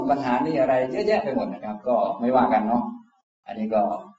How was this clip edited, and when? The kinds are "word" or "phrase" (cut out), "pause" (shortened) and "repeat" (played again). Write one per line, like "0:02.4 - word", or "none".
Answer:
none